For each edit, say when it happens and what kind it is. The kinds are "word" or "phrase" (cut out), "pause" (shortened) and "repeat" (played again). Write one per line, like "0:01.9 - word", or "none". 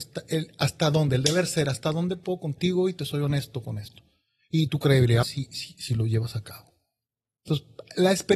0:05.2 - word